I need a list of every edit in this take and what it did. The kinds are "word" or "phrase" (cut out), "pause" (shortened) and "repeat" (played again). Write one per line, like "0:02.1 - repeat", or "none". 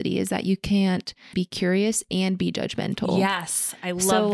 0:01.3 - word